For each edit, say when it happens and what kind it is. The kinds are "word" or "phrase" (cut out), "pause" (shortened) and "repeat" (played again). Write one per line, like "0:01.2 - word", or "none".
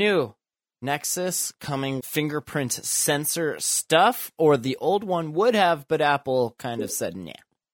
0:02.0 - word

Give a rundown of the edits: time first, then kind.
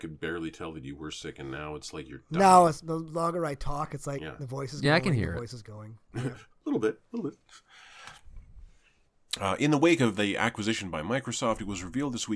none

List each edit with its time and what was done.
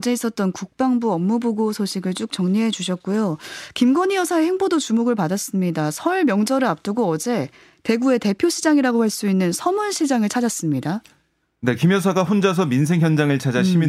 none

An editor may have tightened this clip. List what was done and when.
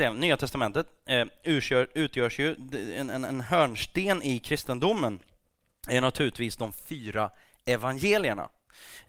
none

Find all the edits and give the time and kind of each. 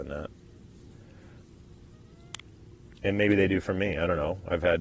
0:02.9 - pause

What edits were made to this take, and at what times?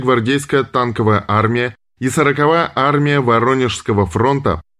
none

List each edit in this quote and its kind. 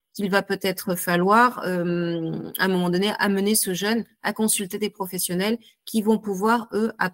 none

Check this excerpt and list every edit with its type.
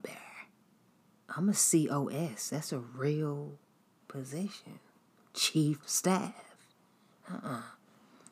0:04.0 - word
0:05.8 - word

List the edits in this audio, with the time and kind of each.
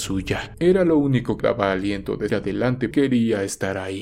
0:01.4 - word
0:02.3 - word
0:02.9 - phrase

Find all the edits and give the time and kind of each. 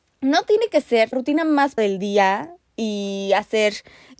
0:01.1 - word
0:01.8 - word

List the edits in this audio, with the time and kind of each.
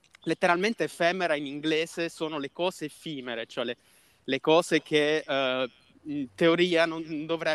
none

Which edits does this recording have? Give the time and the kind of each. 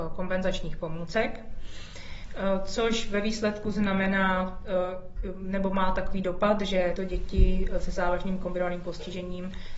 0:07.0 - word

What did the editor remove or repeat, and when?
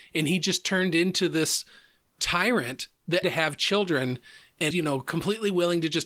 0:03.2 - word
0:04.7 - word

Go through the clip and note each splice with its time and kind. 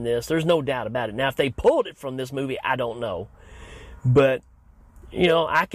none

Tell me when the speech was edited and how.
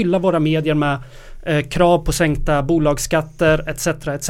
none

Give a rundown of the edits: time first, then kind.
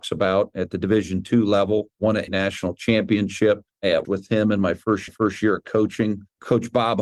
0:02.3 - word
0:04.0 - word
0:05.1 - repeat

